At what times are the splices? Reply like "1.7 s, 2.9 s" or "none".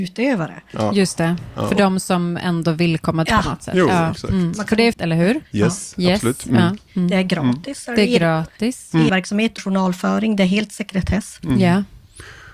3.3 s, 4.9 s, 9.1 s, 9.6 s